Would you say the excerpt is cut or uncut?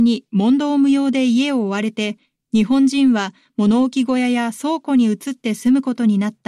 uncut